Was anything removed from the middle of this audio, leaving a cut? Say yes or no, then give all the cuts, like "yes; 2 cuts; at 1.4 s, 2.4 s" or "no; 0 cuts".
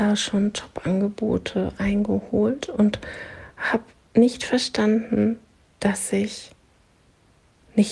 no; 0 cuts